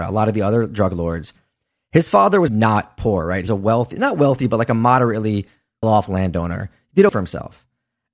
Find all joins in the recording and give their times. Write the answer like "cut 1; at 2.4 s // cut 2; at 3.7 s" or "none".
cut 1; at 2.5 s // cut 2; at 3.5 s // cut 3; at 5.8 s // cut 4; at 7.1 s